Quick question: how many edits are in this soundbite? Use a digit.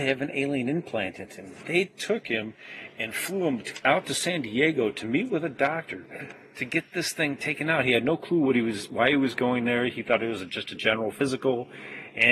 0